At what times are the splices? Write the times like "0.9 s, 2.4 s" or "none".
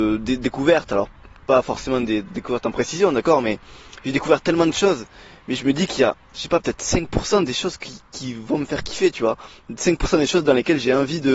none